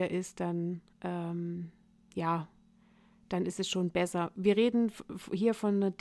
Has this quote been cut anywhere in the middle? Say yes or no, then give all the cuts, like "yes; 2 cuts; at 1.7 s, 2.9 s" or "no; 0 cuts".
no; 0 cuts